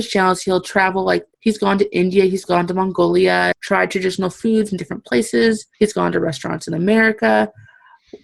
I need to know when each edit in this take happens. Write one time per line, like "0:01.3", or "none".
0:01.3
0:03.5
0:05.7